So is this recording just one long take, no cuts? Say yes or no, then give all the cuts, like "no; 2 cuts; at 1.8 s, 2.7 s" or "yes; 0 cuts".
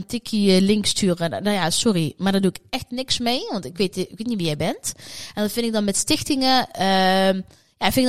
yes; 0 cuts